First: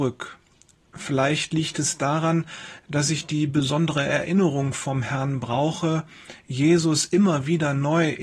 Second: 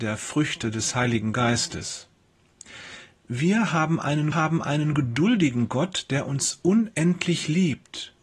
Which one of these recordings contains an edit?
second; 1 cut; at 4.3 s

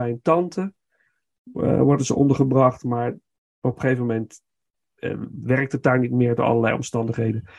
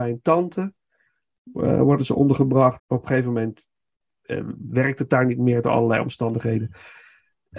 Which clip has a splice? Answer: second; 1 cut; at 2.8 s

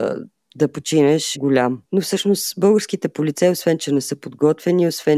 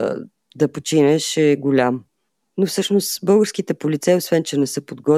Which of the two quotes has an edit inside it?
first; 2 cuts; at 1.3 s, 1.8 s

